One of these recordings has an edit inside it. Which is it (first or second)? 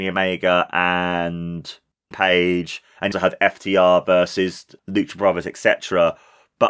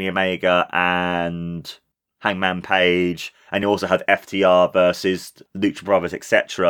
first